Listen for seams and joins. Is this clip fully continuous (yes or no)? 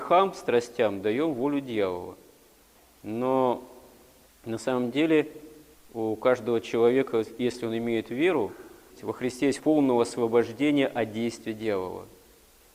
no